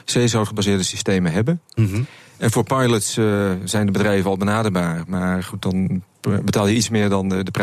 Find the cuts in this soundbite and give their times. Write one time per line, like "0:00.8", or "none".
none